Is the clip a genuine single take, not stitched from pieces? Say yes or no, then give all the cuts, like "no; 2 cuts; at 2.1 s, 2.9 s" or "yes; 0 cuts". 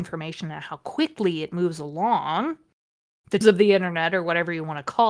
no; 1 cut; at 3.4 s